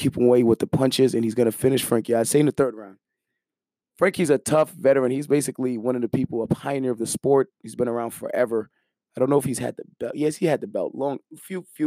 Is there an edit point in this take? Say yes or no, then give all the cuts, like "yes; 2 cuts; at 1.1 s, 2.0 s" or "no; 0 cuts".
no; 0 cuts